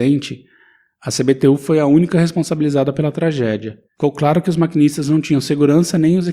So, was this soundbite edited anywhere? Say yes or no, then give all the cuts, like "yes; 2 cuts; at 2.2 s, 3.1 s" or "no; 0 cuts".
yes; 1 cut; at 3.8 s